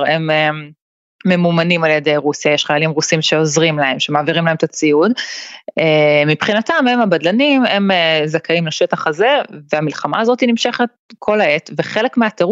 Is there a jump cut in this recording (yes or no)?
no